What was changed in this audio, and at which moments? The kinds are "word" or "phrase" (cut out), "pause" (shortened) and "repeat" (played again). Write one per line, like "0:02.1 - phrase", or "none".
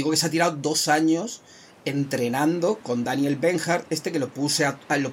none